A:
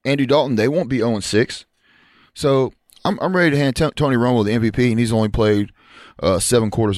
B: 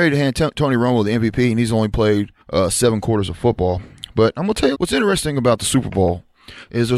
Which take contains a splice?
B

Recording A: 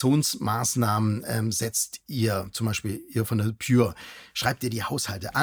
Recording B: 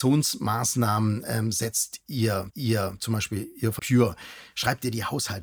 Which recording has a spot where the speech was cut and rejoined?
B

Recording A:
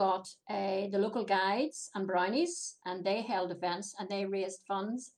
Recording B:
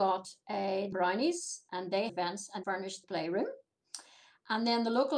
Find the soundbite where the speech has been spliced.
B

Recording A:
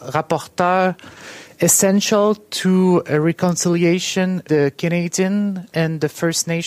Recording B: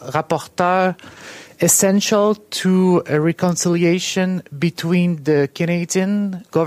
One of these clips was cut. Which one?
A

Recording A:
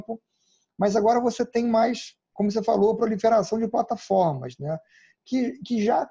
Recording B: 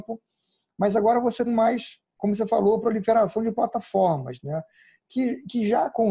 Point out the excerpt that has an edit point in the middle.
B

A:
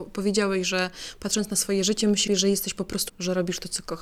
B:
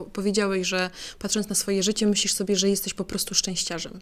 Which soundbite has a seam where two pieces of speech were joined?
A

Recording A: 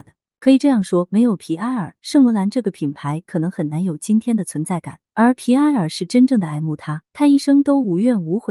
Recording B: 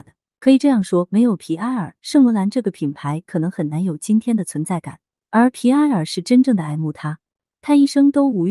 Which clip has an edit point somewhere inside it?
A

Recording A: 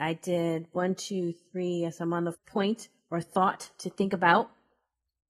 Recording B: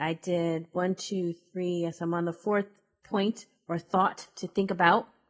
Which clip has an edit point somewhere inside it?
A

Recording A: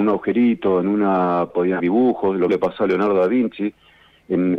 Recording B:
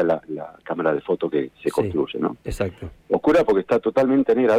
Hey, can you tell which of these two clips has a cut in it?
A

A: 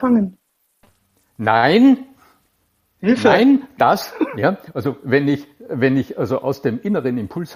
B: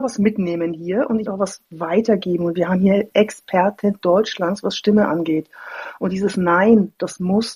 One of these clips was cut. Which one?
B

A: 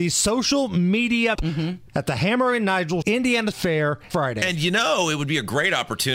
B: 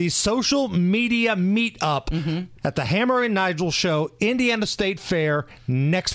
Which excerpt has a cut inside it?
A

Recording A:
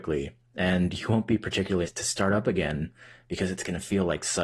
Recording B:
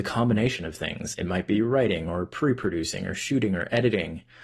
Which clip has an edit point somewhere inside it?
A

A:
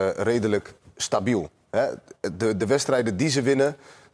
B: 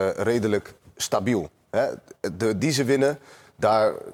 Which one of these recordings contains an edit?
B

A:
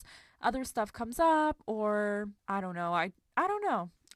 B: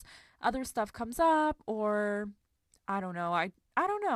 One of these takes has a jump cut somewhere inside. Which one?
A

